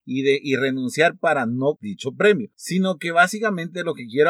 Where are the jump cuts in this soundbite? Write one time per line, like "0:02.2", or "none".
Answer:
0:01.8